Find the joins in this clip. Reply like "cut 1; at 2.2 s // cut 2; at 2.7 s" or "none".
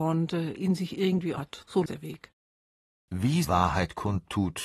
cut 1; at 1.4 s // cut 2; at 1.9 s // cut 3; at 3.4 s